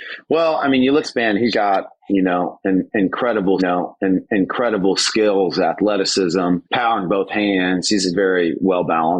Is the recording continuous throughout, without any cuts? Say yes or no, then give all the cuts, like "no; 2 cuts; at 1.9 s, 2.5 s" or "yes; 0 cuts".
no; 5 cuts; at 1.0 s, 1.5 s, 3.6 s, 6.6 s, 8.1 s